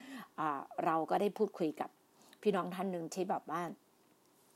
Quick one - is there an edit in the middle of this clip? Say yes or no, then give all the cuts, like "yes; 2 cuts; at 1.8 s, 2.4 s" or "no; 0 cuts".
no; 0 cuts